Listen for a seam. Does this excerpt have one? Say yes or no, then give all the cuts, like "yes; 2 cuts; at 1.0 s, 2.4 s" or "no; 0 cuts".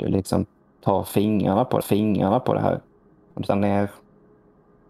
yes; 3 cuts; at 1.8 s, 3.1 s, 3.5 s